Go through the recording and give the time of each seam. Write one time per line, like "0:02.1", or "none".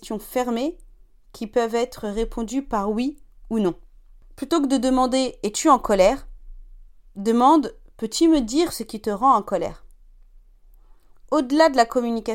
none